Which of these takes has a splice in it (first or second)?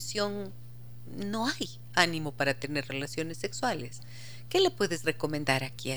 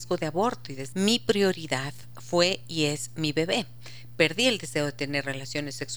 second